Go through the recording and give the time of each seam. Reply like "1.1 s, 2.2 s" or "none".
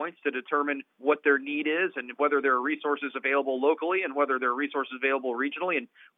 0.9 s